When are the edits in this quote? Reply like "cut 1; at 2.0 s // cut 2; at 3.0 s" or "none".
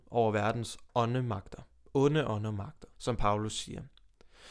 cut 1; at 2.9 s